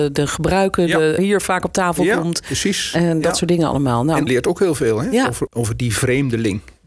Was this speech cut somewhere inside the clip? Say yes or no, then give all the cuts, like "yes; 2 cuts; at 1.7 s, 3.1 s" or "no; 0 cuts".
yes; 3 cuts; at 1.2 s, 4.3 s, 5.5 s